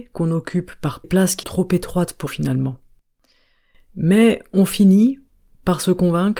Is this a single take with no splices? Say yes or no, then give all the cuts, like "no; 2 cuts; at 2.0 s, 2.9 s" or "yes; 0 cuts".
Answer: no; 3 cuts; at 1.0 s, 1.4 s, 2.3 s